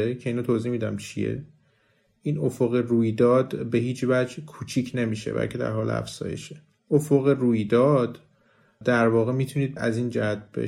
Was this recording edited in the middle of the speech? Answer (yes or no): no